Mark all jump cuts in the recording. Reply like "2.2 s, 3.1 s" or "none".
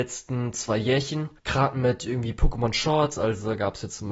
1.4 s